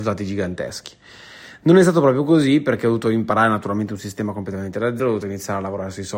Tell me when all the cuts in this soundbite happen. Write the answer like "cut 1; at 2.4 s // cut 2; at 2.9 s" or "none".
cut 1; at 5.0 s